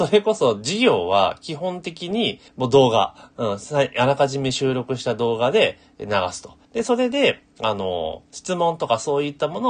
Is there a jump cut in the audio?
yes; 3 cuts; at 2.5 s, 3.3 s, 6.6 s

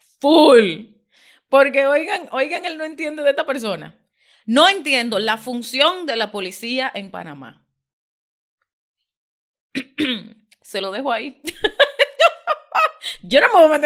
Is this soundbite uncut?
yes; 0 cuts

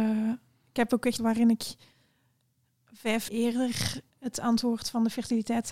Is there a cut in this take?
yes; 3 cuts; at 1.2 s, 3.3 s, 4.1 s

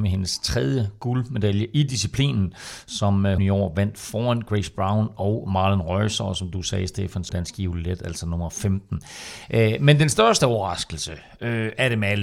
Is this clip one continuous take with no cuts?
no; 2 cuts; at 3.4 s, 7.3 s

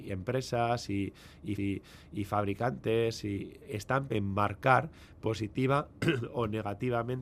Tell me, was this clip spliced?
yes; 2 cuts; at 1.6 s, 4.1 s

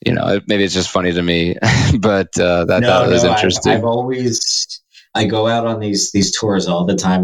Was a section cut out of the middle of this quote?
no; 0 cuts

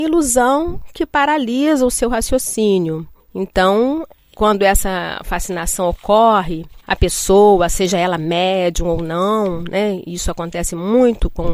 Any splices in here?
yes; 2 cuts; at 3.2 s, 6.8 s

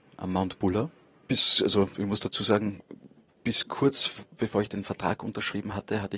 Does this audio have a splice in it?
no; 0 cuts

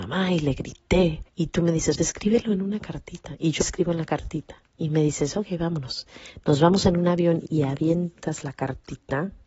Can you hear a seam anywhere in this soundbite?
yes; 4 cuts; at 1.3 s, 2.0 s, 3.6 s, 4.7 s

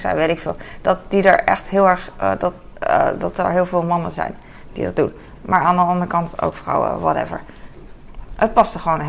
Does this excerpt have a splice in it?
no; 0 cuts

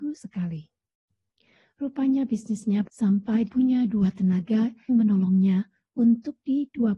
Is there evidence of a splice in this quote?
yes; 3 cuts; at 2.9 s, 3.5 s, 4.9 s

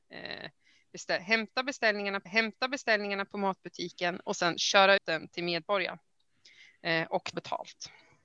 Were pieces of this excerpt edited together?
yes; 3 cuts; at 2.3 s, 5.0 s, 7.3 s

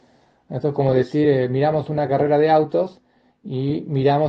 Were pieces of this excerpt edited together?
no; 0 cuts

